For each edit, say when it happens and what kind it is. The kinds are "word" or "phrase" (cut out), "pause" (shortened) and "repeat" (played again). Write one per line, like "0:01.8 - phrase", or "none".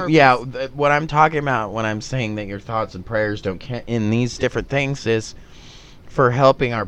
none